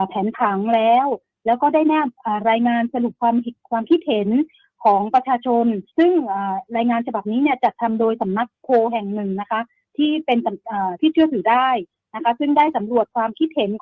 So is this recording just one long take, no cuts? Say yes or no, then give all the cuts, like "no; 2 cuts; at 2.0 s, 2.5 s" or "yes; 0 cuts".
no; 1 cut; at 5.9 s